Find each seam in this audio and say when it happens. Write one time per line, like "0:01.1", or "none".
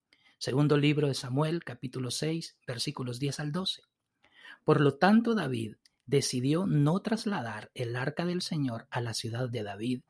none

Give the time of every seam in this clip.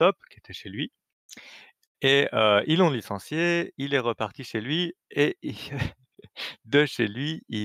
none

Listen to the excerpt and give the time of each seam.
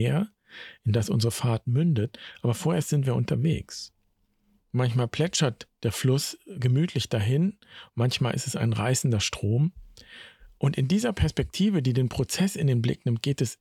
none

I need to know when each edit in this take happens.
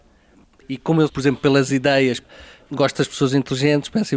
0:01.1

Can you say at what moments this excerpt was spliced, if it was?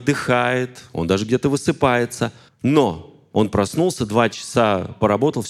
0:02.5

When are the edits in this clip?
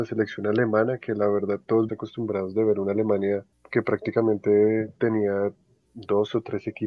0:01.9

